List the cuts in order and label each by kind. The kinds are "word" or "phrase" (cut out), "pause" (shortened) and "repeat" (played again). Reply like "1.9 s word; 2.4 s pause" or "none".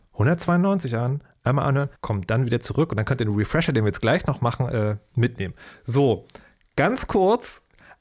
2.0 s pause